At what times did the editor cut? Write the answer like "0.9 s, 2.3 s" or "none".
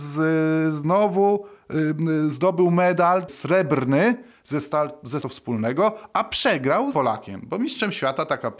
3.3 s, 5.2 s, 6.9 s